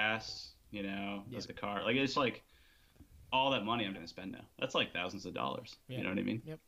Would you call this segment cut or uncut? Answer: cut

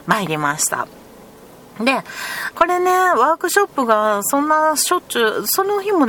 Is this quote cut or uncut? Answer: cut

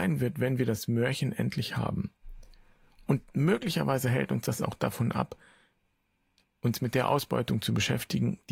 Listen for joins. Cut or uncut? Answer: uncut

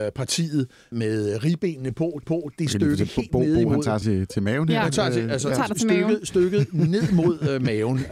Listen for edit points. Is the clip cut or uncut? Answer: cut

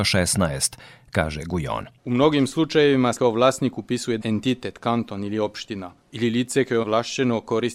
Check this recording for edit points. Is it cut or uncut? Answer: cut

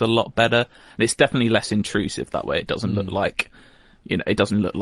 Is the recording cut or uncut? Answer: uncut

